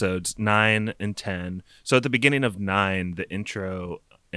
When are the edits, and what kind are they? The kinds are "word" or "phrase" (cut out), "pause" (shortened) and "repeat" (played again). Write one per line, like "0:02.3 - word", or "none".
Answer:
none